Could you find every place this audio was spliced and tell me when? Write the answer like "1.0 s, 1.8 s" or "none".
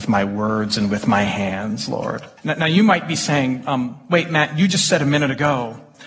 2.4 s